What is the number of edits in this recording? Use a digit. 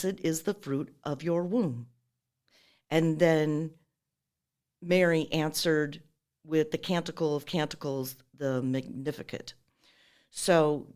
0